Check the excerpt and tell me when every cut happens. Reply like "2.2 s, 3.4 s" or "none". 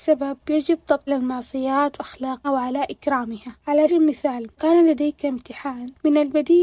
1.1 s, 2.0 s, 2.4 s, 3.9 s, 4.6 s